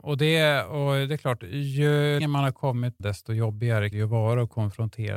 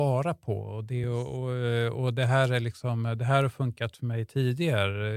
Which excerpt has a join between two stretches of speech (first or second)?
first